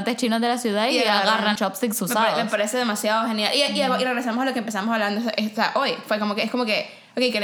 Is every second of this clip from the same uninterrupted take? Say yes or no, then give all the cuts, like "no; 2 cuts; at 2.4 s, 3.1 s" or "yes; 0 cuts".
no; 1 cut; at 1.6 s